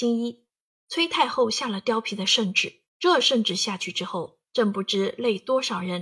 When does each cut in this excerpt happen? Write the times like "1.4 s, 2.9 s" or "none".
2.9 s, 4.5 s